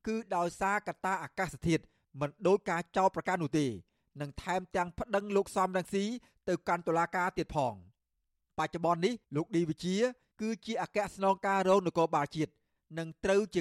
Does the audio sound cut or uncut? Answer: cut